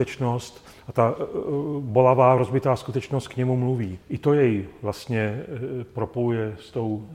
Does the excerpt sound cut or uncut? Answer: cut